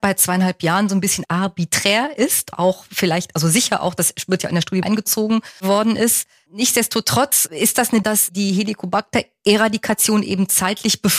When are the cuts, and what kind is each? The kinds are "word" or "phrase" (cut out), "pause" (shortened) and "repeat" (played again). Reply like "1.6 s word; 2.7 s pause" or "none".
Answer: 2.5 s phrase; 4.8 s phrase; 5.6 s pause; 8.0 s word